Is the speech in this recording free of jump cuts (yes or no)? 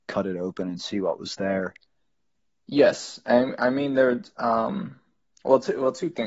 yes